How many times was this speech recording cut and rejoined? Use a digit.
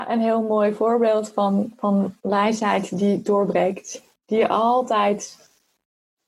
1